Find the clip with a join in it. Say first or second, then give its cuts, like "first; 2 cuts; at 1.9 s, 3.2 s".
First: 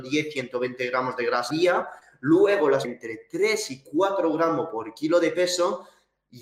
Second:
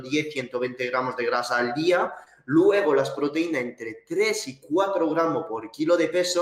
first; 2 cuts; at 1.5 s, 2.8 s